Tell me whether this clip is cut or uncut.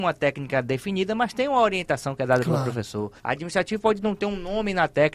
cut